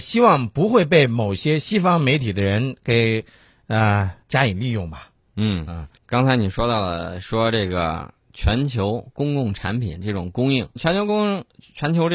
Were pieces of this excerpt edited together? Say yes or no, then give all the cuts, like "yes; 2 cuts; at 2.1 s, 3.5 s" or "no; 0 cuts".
yes; 3 cuts; at 4.2 s, 6.0 s, 10.8 s